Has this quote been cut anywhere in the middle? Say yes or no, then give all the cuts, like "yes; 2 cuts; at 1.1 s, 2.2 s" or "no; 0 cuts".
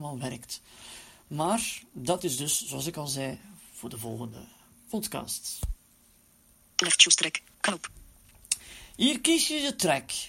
no; 0 cuts